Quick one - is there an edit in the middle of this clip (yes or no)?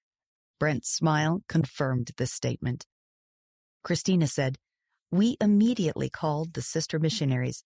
no